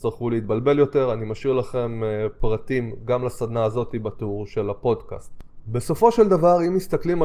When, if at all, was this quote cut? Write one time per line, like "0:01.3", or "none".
none